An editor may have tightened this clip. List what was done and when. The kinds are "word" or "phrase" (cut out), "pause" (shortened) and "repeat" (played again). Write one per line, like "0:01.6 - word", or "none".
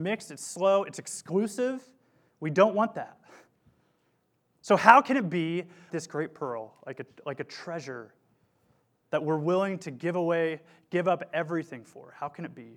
0:05.9 - word